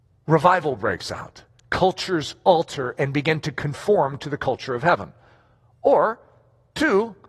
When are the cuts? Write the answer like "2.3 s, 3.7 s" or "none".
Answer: none